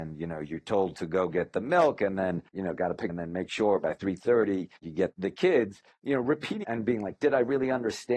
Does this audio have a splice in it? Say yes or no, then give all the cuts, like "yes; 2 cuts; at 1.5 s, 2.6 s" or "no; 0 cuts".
yes; 4 cuts; at 2.5 s, 3.1 s, 4.8 s, 6.6 s